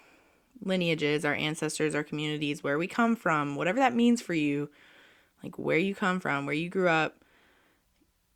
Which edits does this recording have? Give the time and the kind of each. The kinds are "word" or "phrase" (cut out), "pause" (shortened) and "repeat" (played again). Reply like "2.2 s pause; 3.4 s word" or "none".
none